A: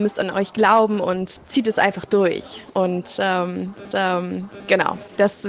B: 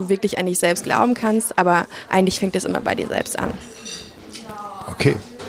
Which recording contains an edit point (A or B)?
A